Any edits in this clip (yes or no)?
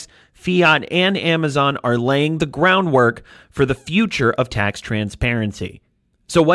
no